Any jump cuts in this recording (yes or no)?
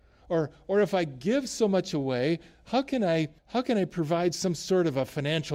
yes